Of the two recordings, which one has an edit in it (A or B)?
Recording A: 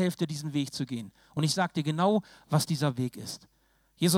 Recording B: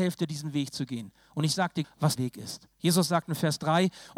B